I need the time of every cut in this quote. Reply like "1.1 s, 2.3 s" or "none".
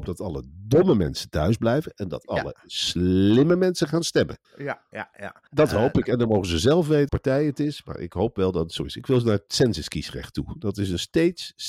4.4 s, 5.5 s, 7.1 s